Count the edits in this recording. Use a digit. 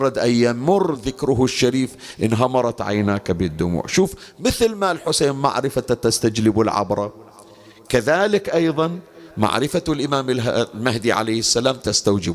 0